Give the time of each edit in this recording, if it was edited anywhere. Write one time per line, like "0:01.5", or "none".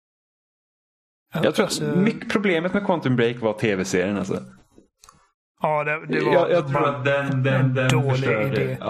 none